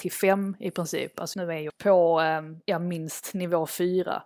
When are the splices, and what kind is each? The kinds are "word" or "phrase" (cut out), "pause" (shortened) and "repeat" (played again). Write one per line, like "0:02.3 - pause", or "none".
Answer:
0:01.3 - word
0:01.7 - word